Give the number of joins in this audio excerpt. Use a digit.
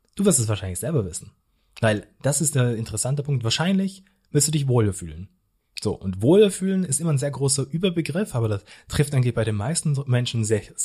0